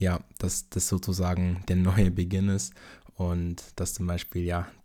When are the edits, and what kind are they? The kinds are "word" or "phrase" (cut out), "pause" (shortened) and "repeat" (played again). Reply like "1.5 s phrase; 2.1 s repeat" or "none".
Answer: none